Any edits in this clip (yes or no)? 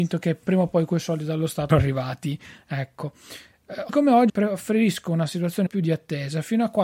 yes